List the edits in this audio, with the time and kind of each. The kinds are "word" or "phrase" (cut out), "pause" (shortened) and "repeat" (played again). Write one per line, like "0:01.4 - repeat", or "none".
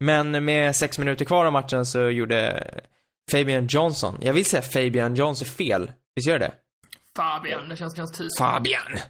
0:05.4 - phrase
0:06.0 - pause
0:06.7 - pause
0:07.9 - repeat